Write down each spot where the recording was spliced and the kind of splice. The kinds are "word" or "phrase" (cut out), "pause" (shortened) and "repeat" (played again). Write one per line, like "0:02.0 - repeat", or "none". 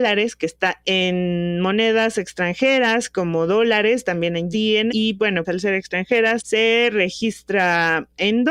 0:04.5 - word
0:04.9 - word
0:05.4 - word
0:06.4 - word